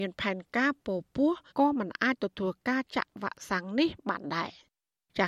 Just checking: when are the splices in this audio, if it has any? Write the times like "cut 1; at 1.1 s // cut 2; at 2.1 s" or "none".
cut 1; at 1.5 s

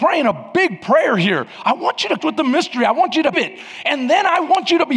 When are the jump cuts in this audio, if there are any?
cut 1; at 2.2 s // cut 2; at 3.3 s

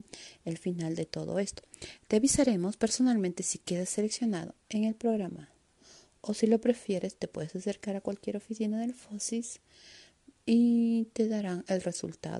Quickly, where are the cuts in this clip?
none

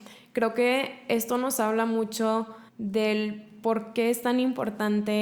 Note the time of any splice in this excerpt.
cut 1; at 2.7 s

